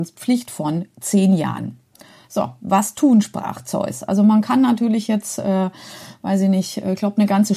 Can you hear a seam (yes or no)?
no